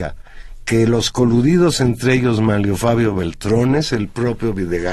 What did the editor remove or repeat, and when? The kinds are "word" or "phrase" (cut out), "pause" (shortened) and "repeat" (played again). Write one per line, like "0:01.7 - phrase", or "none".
none